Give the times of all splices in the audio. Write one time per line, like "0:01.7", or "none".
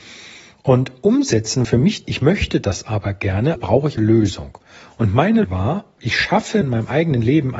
0:01.6
0:02.0
0:03.6
0:04.0
0:05.4
0:06.0
0:06.6